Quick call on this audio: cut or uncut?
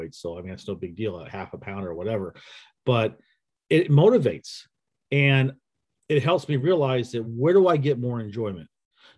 uncut